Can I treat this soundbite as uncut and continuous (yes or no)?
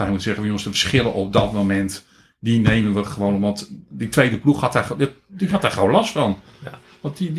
yes